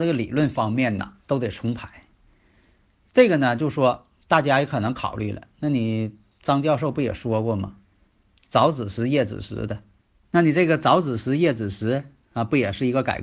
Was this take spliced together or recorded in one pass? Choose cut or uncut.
uncut